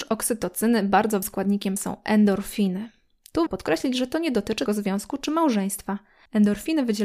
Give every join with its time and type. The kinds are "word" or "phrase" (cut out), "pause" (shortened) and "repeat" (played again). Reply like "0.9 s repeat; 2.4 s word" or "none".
1.2 s word; 1.8 s word; 3.5 s word; 4.7 s word